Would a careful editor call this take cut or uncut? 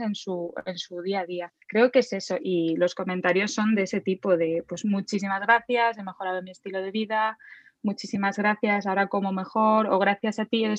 cut